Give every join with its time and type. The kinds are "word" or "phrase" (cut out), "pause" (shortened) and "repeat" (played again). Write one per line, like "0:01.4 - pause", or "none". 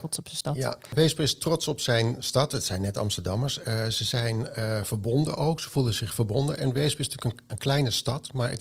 none